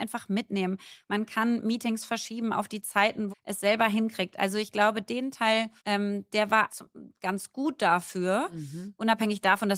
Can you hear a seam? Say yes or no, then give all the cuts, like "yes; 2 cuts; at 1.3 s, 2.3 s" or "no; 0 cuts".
yes; 3 cuts; at 3.3 s, 5.8 s, 6.7 s